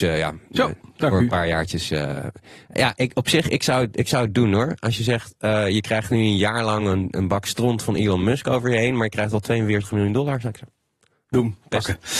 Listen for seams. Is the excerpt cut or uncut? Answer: uncut